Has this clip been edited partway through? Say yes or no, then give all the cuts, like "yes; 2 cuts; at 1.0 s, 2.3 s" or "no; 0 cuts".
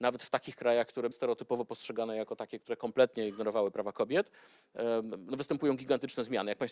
yes; 1 cut; at 1.1 s